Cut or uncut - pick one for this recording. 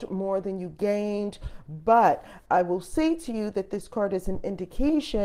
uncut